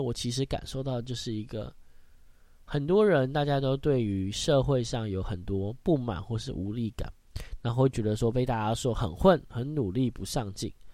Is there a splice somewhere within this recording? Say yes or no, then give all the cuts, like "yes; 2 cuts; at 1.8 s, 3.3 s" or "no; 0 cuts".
no; 0 cuts